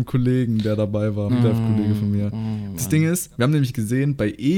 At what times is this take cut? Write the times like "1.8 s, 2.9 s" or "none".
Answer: 1.3 s, 2.7 s